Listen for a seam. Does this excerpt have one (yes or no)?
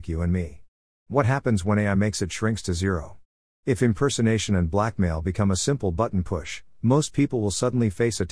no